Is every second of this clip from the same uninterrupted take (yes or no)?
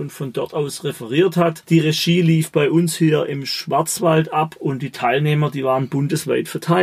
yes